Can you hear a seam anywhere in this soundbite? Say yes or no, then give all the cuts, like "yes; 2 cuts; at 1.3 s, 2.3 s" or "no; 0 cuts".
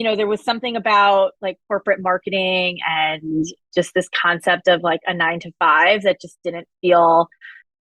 no; 0 cuts